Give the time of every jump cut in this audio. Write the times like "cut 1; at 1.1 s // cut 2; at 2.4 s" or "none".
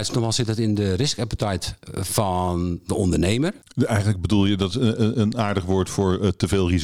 cut 1; at 3.6 s